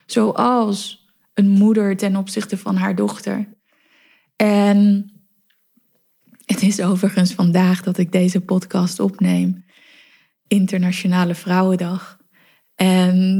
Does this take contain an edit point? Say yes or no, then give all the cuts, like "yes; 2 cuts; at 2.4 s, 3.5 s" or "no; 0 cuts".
no; 0 cuts